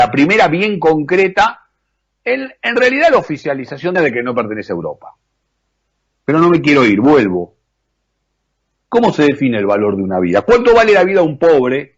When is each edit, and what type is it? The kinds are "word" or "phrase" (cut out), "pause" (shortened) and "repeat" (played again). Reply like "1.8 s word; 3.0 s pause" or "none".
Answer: 3.9 s phrase